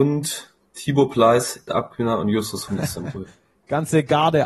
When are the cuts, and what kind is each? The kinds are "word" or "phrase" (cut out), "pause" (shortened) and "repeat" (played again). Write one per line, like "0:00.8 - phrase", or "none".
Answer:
0:01.7 - word
0:02.7 - word